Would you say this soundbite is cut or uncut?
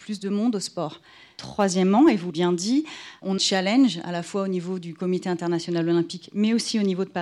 cut